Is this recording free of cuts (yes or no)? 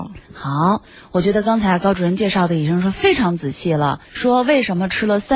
no